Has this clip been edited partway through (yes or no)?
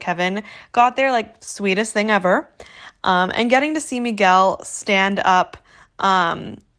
no